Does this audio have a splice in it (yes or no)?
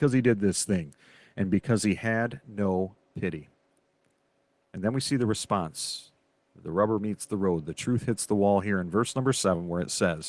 no